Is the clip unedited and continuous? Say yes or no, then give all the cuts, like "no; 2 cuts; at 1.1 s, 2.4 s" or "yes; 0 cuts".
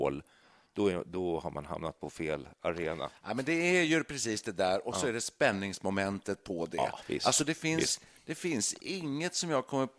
yes; 0 cuts